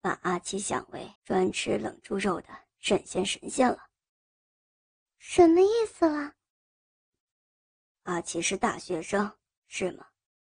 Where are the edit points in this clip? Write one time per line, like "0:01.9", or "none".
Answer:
0:01.2